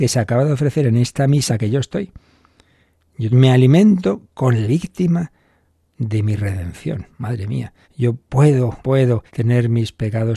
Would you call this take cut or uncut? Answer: cut